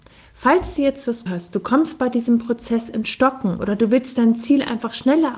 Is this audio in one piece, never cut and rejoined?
no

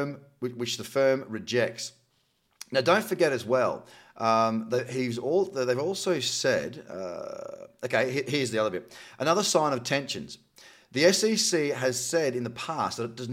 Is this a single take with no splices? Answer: yes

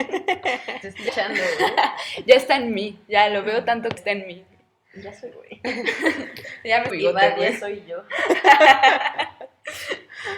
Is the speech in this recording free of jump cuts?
no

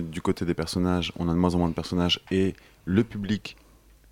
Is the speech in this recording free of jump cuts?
yes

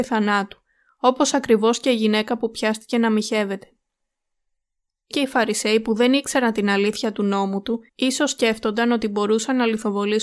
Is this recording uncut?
no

